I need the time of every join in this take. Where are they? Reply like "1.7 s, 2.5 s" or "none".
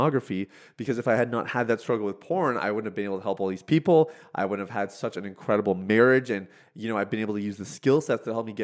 none